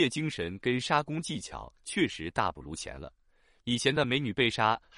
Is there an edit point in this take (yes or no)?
no